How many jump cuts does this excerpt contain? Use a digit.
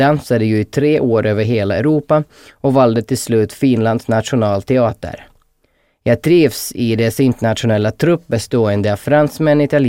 0